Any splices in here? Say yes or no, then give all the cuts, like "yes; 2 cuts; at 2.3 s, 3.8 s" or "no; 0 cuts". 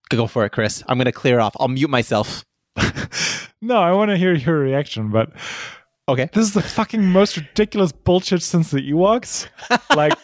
no; 0 cuts